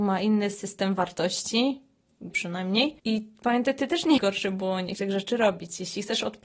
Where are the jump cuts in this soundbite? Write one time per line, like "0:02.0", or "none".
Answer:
0:02.3
0:03.0
0:04.2
0:05.0

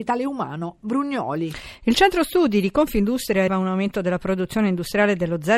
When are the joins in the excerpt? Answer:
0:03.5

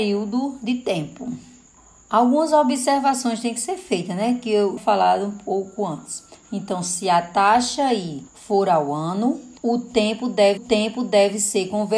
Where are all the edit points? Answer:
0:01.8
0:04.8
0:08.3
0:09.6
0:10.6

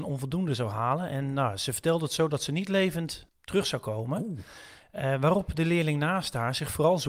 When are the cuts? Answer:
0:03.3

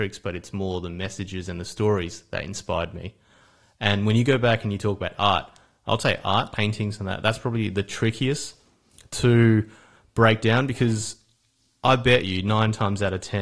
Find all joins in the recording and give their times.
0:06.5

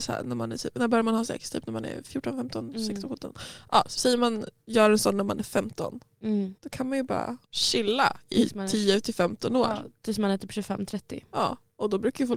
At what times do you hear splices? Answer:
0:06.6
0:07.4

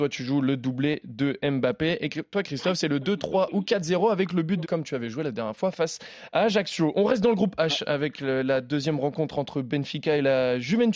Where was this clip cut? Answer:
0:04.6

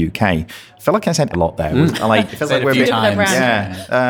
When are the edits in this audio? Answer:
0:01.3
0:02.3
0:02.8

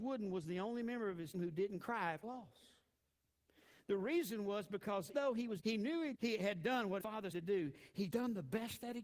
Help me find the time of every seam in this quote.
0:01.3
0:02.2
0:05.1
0:05.6
0:06.1
0:07.0
0:07.3
0:08.1

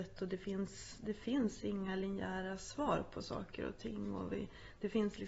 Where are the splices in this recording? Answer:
none

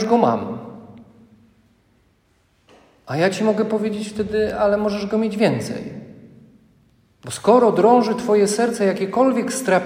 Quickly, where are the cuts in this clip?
none

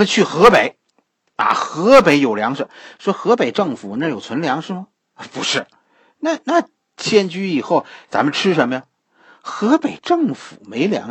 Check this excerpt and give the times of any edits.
none

